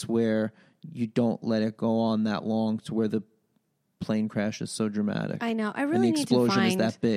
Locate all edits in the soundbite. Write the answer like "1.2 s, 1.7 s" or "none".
none